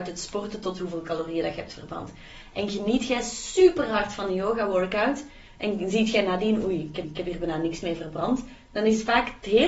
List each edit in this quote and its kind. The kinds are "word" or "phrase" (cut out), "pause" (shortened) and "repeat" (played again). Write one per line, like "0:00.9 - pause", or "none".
0:07.0 - repeat